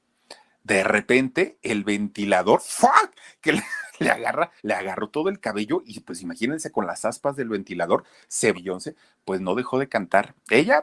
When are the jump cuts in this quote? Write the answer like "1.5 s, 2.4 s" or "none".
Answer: 4.6 s, 8.5 s